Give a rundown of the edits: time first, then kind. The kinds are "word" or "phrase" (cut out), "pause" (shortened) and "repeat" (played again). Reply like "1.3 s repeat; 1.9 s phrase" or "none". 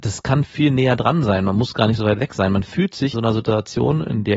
3.1 s word

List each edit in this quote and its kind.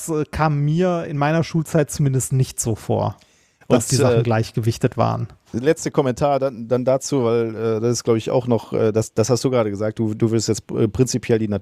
none

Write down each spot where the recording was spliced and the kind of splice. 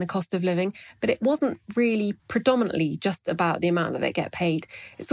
2.2 s pause

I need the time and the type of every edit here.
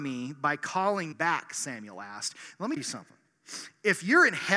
1.1 s word; 2.8 s word

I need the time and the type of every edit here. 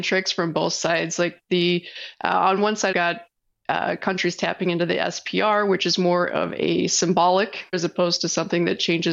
2.9 s phrase; 7.7 s word

